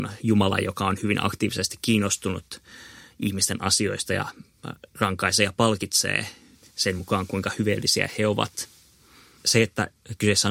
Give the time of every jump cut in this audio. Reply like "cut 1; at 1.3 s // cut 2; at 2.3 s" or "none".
none